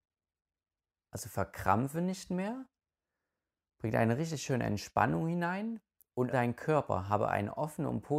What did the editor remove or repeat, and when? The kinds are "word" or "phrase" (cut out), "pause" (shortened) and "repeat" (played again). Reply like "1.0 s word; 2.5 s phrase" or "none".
6.3 s word